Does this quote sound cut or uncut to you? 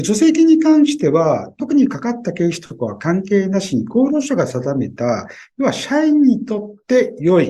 uncut